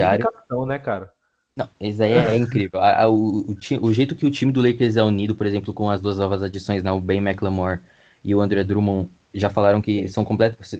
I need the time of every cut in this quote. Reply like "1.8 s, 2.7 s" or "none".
none